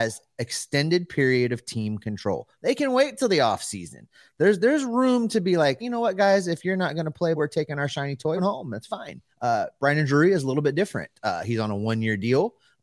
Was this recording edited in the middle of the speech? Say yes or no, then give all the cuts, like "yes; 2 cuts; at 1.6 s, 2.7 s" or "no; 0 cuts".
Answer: yes; 4 cuts; at 5.8 s, 7.4 s, 8.4 s, 9.3 s